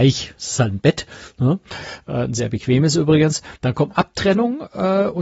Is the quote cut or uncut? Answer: cut